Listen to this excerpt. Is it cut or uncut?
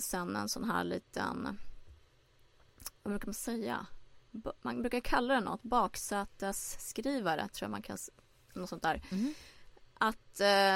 uncut